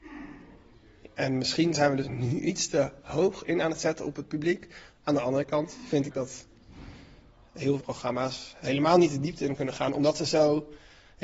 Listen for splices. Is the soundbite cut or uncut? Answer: cut